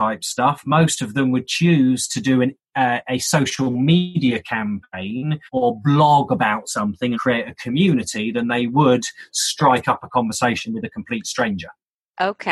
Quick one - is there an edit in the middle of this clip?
yes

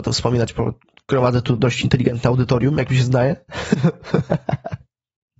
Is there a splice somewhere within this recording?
no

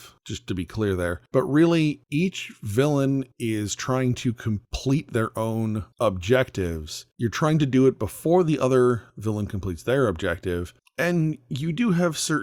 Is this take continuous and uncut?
yes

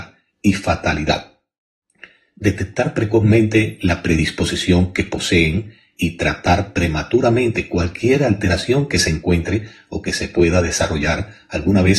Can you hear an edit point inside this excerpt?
no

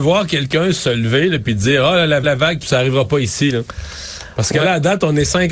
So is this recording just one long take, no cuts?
no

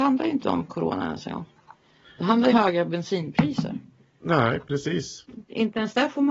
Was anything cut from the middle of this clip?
yes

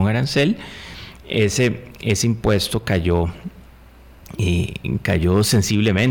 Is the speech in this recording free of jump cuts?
yes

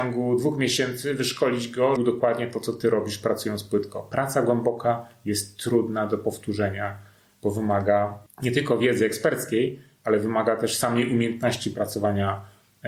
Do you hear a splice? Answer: yes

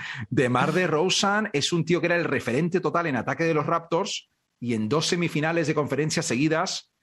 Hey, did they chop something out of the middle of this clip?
no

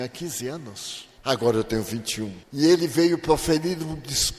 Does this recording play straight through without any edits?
no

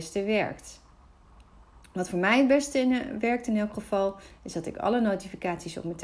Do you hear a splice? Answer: no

